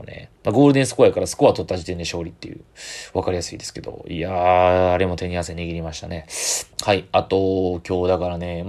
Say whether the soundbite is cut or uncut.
cut